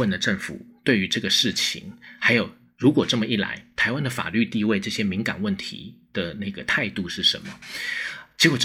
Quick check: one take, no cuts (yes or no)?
yes